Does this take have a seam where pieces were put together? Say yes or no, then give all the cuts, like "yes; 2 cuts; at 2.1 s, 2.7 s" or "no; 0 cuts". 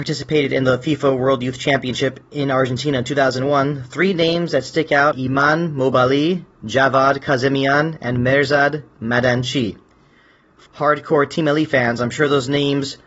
yes; 2 cuts; at 5.1 s, 10.7 s